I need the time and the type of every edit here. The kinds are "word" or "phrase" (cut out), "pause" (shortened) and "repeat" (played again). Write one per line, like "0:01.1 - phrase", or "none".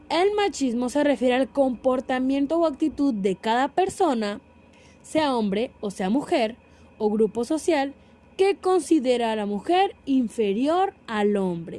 none